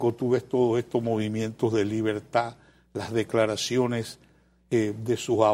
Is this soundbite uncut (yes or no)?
yes